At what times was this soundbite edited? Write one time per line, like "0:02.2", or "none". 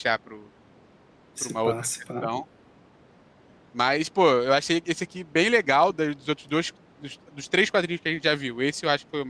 none